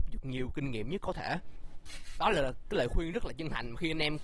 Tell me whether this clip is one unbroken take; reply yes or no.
no